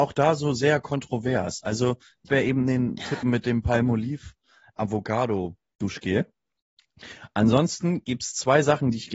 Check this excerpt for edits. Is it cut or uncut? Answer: cut